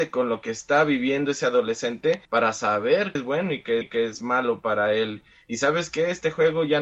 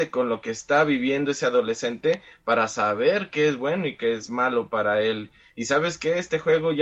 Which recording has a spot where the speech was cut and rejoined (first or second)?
first